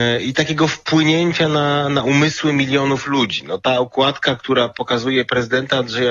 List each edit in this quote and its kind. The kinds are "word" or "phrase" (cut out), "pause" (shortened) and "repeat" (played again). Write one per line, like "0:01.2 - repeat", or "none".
none